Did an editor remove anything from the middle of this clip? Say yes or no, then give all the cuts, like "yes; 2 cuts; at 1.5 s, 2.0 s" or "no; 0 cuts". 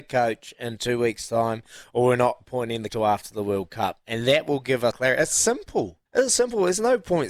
yes; 3 cuts; at 2.9 s, 4.9 s, 6.1 s